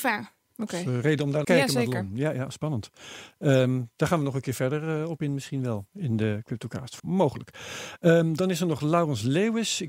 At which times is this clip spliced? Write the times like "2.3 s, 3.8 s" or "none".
1.4 s, 7.0 s